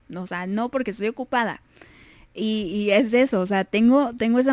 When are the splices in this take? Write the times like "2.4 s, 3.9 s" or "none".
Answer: none